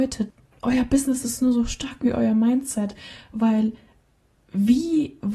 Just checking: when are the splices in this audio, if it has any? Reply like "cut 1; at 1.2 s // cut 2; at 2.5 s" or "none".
none